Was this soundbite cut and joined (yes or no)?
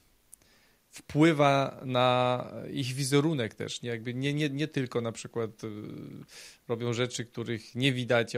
no